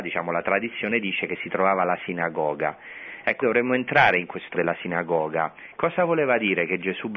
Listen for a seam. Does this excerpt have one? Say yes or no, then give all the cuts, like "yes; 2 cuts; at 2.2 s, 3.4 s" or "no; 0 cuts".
yes; 2 cuts; at 3.4 s, 4.5 s